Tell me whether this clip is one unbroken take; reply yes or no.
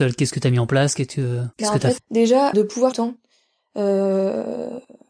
no